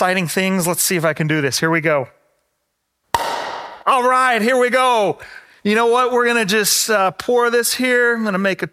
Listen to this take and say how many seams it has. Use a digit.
0